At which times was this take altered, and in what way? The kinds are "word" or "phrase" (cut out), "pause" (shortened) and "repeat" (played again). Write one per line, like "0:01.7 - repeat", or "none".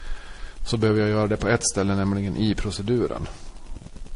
none